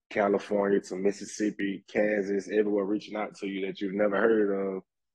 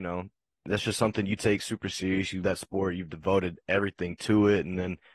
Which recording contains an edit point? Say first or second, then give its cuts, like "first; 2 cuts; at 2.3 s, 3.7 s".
second; 1 cut; at 2.4 s